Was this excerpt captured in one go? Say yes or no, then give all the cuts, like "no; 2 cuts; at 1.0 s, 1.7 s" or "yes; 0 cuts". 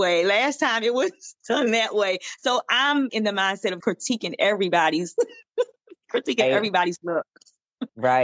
no; 2 cuts; at 3.1 s, 3.8 s